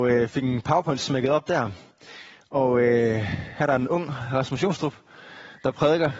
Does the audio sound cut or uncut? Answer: uncut